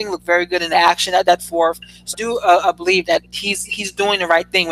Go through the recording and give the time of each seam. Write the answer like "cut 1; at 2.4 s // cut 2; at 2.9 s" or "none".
cut 1; at 1.4 s // cut 2; at 2.1 s // cut 3; at 3.0 s